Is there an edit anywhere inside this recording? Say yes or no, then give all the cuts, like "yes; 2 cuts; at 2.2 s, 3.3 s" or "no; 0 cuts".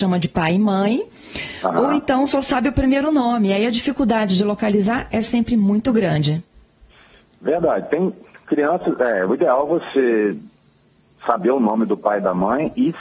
no; 0 cuts